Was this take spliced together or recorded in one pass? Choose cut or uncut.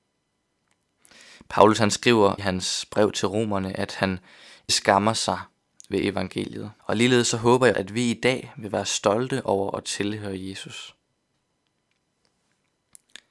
cut